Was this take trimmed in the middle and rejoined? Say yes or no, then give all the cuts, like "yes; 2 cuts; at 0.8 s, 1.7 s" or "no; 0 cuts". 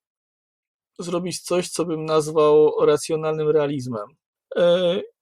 no; 0 cuts